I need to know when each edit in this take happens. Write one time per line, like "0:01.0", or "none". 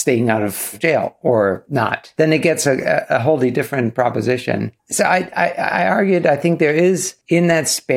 none